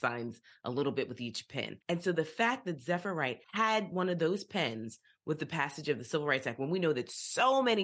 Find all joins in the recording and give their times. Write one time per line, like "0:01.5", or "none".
0:01.8
0:03.4